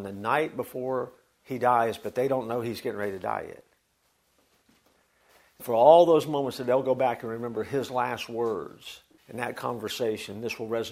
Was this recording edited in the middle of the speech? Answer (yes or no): yes